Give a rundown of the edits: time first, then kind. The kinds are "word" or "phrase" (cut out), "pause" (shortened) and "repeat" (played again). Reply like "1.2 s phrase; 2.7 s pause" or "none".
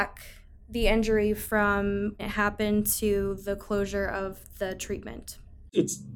2.2 s word